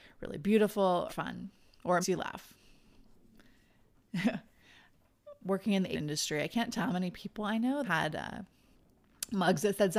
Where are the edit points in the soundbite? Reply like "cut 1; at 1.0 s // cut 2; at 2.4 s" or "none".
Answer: cut 1; at 1.1 s // cut 2; at 2.0 s // cut 3; at 5.4 s // cut 4; at 5.9 s // cut 5; at 6.8 s // cut 6; at 7.8 s